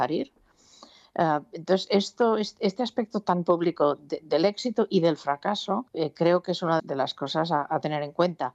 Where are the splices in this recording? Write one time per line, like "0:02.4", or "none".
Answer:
0:05.9
0:06.8